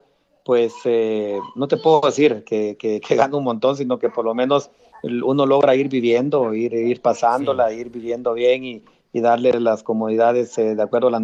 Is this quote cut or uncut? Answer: uncut